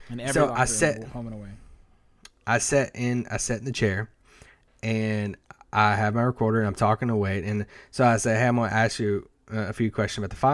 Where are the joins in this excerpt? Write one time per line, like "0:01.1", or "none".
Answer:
none

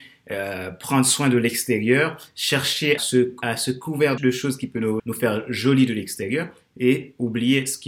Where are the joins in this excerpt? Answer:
0:03.0
0:03.4
0:04.2
0:05.0

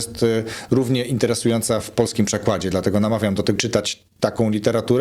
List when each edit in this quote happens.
0:03.6

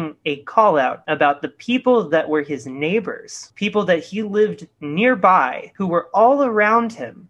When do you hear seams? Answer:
0:01.0

